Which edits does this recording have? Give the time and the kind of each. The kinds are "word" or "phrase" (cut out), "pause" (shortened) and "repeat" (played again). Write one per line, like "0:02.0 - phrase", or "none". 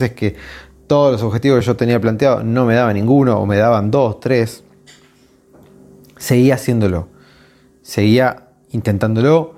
none